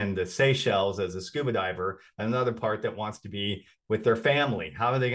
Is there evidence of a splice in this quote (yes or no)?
no